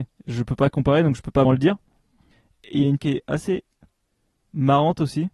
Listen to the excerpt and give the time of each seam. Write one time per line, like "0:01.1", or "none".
0:01.4
0:03.0

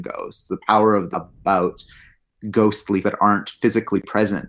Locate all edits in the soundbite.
0:01.1
0:03.0

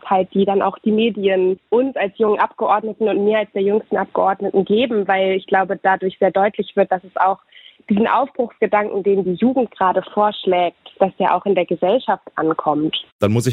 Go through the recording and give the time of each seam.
none

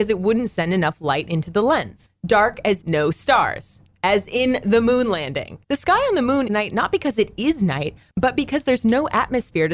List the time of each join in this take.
0:02.8
0:05.6
0:06.5

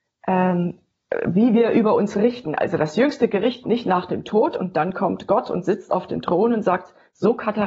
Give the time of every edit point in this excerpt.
0:03.6

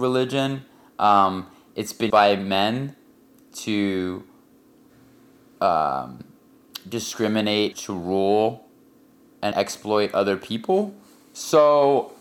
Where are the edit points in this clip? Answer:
0:02.1
0:07.7
0:09.5

